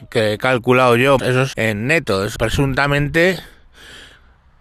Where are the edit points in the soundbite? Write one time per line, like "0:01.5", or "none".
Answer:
0:01.2
0:01.5
0:02.4